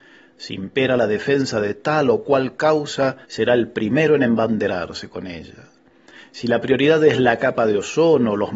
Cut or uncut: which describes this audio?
cut